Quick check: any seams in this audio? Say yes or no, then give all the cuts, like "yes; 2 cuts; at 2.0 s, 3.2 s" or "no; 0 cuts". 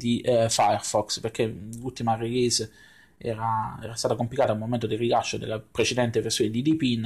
no; 0 cuts